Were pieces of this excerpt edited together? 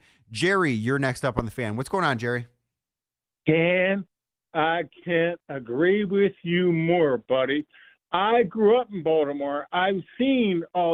no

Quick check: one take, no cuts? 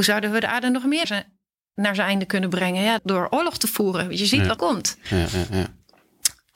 no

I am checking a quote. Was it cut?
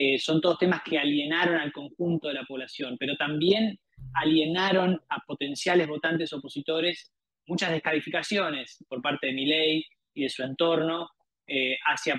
no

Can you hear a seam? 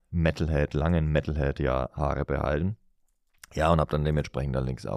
no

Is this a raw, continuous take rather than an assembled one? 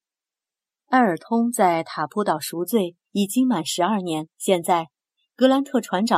no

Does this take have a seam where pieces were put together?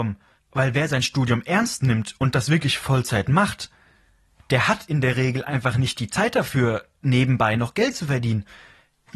no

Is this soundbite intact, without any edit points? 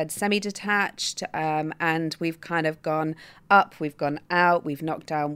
yes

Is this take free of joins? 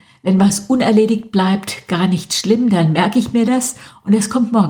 yes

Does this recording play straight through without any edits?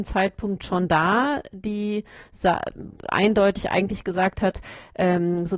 yes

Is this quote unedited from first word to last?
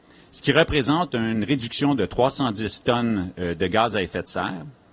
yes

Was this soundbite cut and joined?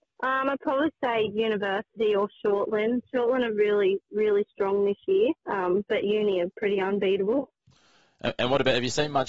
yes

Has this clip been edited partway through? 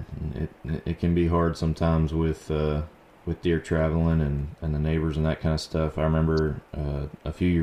no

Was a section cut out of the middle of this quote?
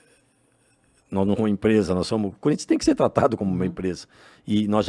yes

